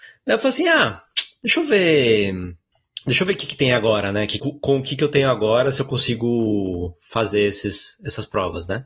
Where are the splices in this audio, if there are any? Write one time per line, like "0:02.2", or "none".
0:04.4